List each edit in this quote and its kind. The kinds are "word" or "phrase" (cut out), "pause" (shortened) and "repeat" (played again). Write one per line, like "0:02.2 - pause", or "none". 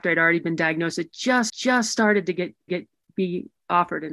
0:01.5 - repeat
0:02.7 - repeat